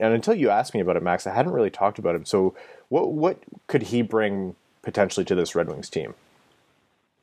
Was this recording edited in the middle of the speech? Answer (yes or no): no